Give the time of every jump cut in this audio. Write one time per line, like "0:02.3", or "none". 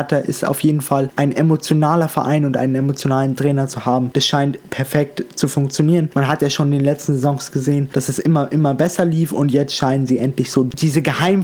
none